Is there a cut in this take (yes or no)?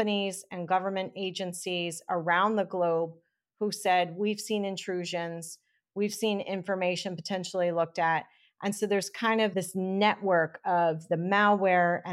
no